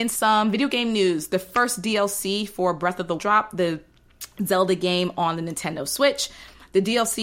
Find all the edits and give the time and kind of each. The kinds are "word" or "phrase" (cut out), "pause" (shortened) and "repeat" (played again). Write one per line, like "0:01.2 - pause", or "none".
0:03.2 - word